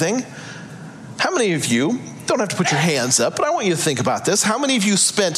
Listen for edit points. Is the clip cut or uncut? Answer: uncut